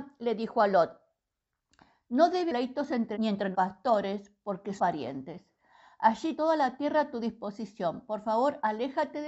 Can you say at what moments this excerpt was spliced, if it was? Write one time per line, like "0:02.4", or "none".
0:02.5
0:03.1
0:03.5
0:04.8
0:06.4